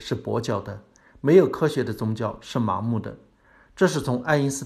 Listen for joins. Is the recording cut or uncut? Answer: uncut